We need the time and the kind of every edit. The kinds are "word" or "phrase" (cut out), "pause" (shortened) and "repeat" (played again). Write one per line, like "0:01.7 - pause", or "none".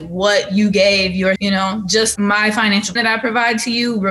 0:01.4 - word
0:02.2 - word
0:03.0 - word